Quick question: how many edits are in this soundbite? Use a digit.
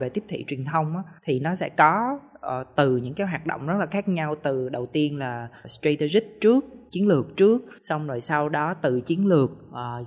4